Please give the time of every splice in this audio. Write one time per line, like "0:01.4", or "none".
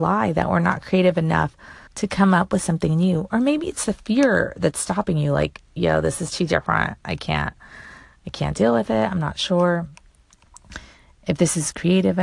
0:01.9